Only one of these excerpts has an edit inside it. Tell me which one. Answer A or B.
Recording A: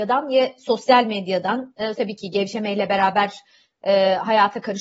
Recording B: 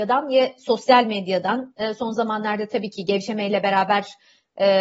A